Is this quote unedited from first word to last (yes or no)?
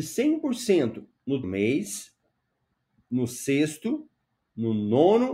no